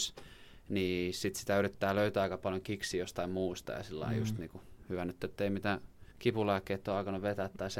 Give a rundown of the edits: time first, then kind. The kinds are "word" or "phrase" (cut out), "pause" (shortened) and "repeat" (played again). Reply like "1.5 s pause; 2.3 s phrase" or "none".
6.1 s pause